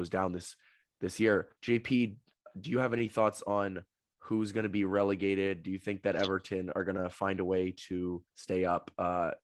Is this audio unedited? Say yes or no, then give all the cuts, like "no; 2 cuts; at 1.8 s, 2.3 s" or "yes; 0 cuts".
no; 2 cuts; at 1.6 s, 8.3 s